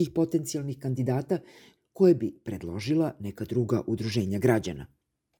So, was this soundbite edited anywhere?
no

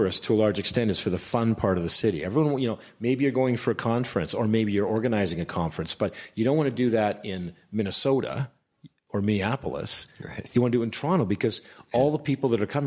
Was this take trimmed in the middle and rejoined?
no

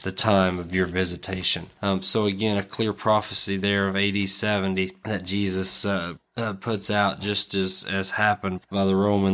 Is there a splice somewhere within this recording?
no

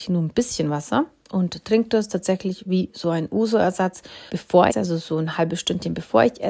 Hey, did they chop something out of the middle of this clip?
yes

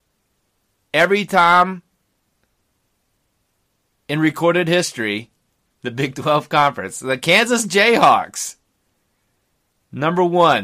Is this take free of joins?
yes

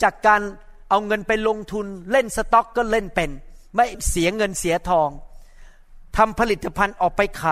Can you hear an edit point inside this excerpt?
no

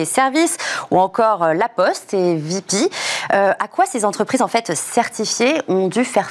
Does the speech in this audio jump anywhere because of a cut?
no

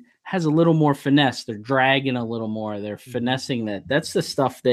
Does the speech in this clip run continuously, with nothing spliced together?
yes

